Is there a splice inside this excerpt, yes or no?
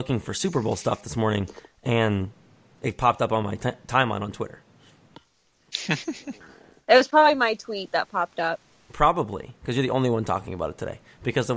no